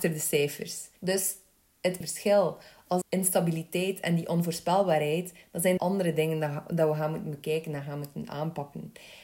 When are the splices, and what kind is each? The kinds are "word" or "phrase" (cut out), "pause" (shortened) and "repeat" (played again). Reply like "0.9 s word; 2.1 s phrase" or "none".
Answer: 1.0 s pause; 2.0 s phrase; 3.0 s phrase; 5.8 s word